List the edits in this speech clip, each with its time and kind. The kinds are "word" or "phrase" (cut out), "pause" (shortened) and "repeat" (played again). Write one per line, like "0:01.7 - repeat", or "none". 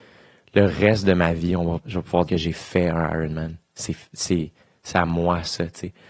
0:01.8 - word
0:02.3 - word